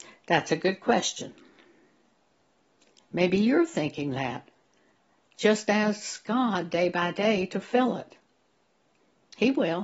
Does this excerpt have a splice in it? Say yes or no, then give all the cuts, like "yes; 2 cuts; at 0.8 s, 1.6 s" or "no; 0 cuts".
no; 0 cuts